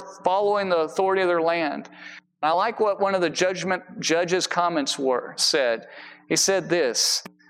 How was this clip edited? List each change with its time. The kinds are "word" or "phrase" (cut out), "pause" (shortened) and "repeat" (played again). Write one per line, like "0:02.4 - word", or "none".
none